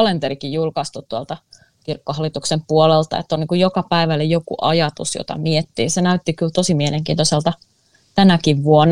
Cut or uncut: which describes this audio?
uncut